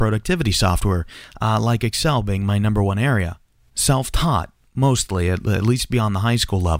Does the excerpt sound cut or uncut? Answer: uncut